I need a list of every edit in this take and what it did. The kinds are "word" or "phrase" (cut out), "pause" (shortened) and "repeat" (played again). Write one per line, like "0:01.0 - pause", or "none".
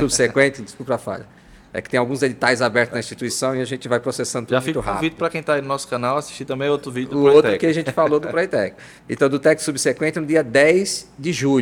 0:09.0 - pause